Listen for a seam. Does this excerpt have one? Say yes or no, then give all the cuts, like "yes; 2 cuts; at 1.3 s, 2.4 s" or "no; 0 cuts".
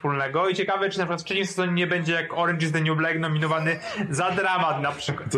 no; 0 cuts